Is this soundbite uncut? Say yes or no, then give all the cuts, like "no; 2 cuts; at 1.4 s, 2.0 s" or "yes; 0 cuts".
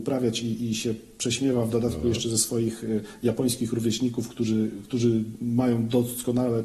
yes; 0 cuts